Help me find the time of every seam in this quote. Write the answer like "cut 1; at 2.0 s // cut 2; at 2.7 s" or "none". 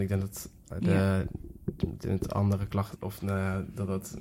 cut 1; at 3.0 s

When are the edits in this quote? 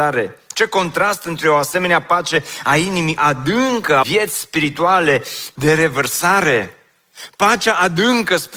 cut 1; at 3.2 s // cut 2; at 4.0 s // cut 3; at 5.5 s

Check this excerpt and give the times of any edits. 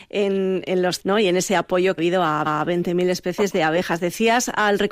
cut 1; at 1.0 s // cut 2; at 2.0 s // cut 3; at 2.5 s

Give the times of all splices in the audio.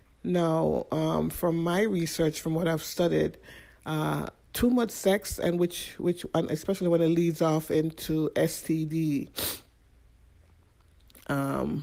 cut 1; at 4.5 s

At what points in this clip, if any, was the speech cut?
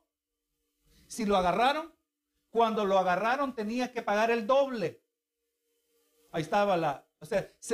none

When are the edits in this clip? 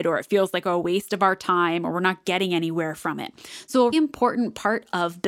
cut 1; at 3.9 s

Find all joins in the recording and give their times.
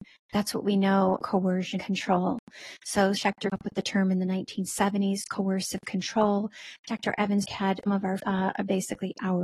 cut 1; at 1.2 s // cut 2; at 1.8 s // cut 3; at 3.2 s // cut 4; at 3.5 s // cut 5; at 7.4 s // cut 6; at 7.9 s // cut 7; at 8.2 s

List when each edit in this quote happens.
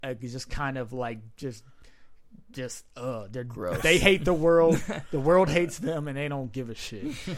none

